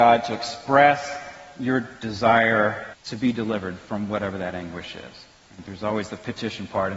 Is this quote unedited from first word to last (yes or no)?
no